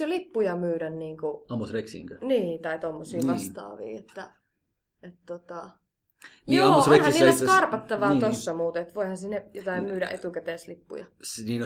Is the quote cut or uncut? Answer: uncut